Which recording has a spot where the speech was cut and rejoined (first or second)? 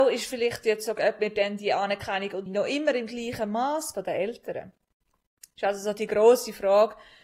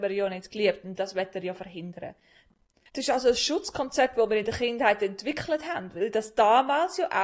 first